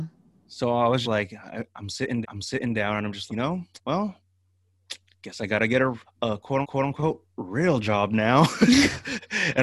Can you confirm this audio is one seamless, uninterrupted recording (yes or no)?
no